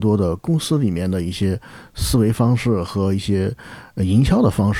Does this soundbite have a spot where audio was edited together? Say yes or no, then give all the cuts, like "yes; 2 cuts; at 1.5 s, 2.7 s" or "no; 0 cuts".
no; 0 cuts